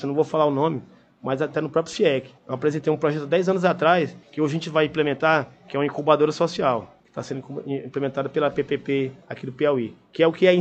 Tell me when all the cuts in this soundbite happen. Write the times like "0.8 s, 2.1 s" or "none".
2.4 s, 4.2 s, 7.0 s, 9.2 s